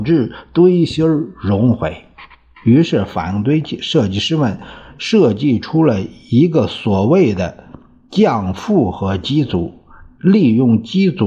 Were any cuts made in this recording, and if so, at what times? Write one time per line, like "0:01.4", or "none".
none